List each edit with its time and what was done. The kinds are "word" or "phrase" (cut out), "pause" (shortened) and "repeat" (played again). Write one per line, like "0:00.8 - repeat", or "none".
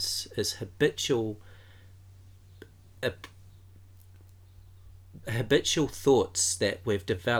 0:05.2 - word